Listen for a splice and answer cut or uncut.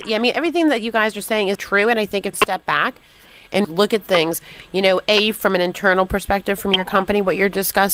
cut